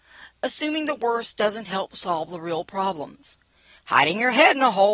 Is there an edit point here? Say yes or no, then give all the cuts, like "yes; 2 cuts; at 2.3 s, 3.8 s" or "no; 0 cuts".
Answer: no; 0 cuts